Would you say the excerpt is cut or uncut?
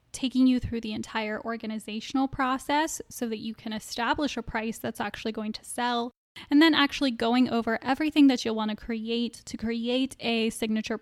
uncut